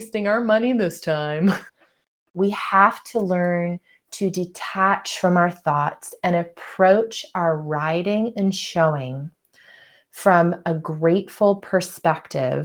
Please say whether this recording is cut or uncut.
cut